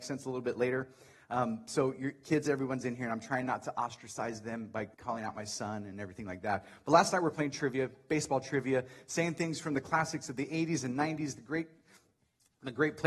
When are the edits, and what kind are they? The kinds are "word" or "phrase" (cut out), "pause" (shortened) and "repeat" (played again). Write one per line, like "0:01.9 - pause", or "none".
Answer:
0:04.9 - pause